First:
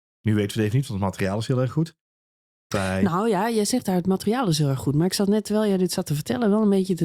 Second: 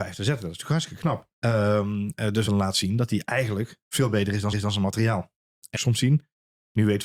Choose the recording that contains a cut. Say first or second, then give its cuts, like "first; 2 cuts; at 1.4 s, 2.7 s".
second; 5 cuts; at 1.3 s, 2.5 s, 3.8 s, 4.5 s, 5.8 s